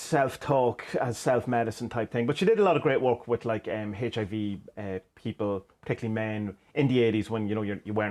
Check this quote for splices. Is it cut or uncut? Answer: uncut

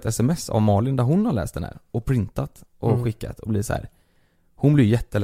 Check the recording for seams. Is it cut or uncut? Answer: uncut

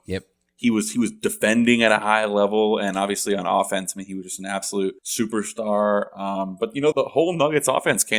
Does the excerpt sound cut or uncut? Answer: cut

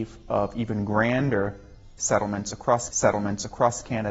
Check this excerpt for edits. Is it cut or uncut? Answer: cut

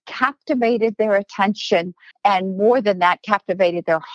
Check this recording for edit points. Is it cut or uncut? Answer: cut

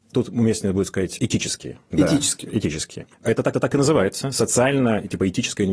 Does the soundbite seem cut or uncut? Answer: cut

